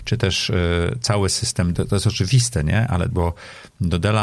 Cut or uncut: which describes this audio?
cut